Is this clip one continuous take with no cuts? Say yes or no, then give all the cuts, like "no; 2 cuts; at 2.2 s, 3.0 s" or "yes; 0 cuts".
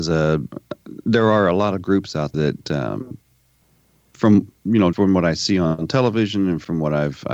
no; 2 cuts; at 2.3 s, 4.9 s